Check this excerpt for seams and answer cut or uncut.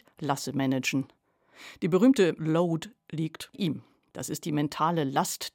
cut